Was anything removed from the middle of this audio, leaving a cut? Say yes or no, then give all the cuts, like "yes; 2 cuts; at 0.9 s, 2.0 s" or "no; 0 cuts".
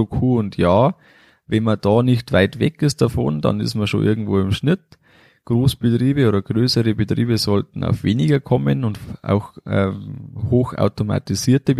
no; 0 cuts